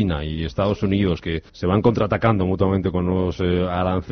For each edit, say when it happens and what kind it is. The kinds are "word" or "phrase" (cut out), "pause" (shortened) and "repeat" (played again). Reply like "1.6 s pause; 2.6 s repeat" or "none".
1.5 s pause

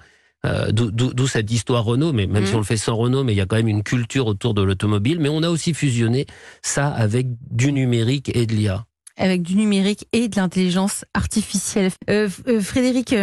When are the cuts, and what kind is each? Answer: none

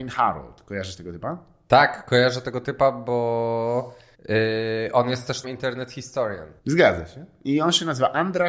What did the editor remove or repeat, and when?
4.1 s pause; 5.4 s word; 6.6 s pause

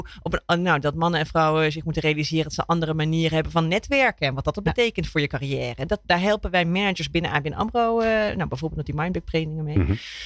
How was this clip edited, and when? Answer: none

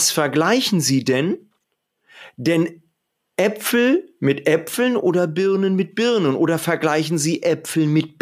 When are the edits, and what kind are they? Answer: none

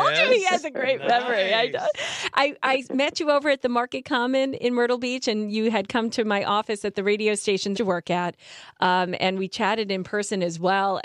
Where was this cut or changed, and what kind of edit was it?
7.7 s phrase

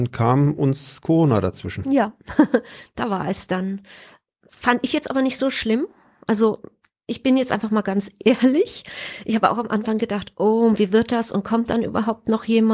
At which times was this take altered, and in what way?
none

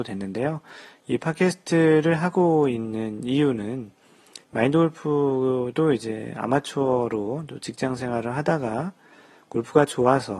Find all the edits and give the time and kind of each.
4.4 s pause

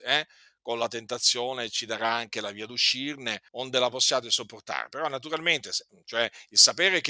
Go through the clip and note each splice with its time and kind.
3.5 s pause

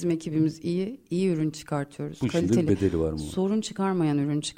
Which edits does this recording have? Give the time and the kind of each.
none

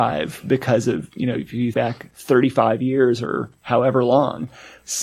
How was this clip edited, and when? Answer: 1.7 s word

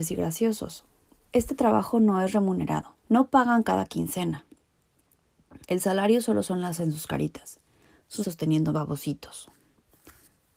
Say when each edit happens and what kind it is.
1.1 s pause; 3.0 s pause; 5.6 s pause; 6.8 s word; 8.2 s word; 8.7 s phrase

